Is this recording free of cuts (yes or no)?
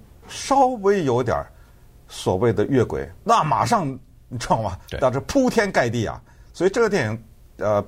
no